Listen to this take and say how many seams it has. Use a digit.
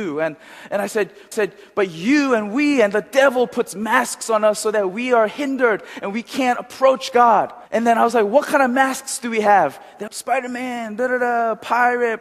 3